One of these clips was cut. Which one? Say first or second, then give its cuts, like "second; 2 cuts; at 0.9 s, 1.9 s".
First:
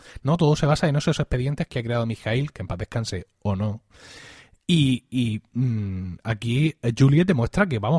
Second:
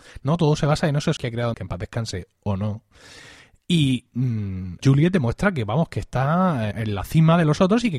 second; 5 cuts; at 1.2 s, 1.5 s, 4.1 s, 4.8 s, 6.7 s